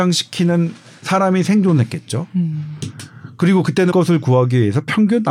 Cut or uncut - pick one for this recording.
cut